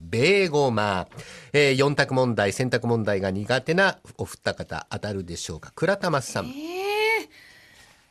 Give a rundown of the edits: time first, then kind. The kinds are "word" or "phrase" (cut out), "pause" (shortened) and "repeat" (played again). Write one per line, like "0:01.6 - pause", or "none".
none